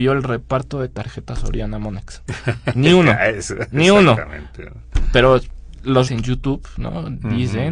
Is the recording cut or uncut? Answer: cut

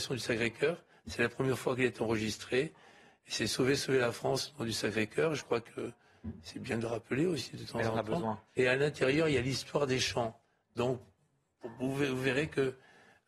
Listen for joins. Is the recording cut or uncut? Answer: uncut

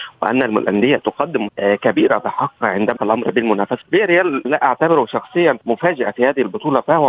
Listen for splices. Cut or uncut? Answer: cut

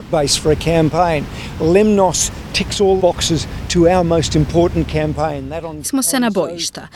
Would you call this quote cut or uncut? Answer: cut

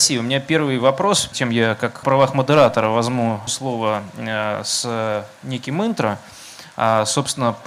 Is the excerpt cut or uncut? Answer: cut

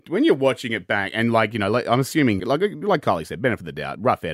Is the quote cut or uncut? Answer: cut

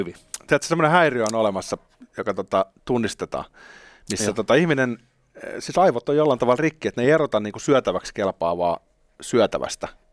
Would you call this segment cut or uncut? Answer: uncut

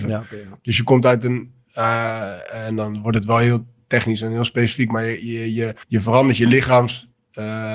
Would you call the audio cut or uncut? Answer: cut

